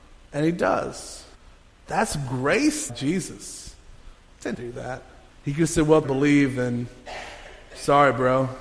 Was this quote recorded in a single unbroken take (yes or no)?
no